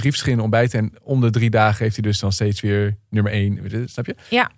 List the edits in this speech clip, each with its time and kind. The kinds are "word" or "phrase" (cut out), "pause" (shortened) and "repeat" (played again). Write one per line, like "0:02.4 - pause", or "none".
none